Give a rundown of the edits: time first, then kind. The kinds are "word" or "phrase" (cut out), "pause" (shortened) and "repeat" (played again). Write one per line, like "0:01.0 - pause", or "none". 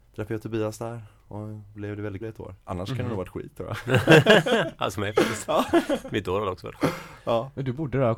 0:01.7 - word
0:02.2 - word
0:02.6 - pause
0:04.9 - word